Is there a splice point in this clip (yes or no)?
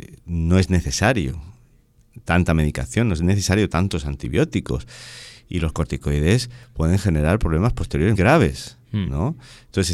yes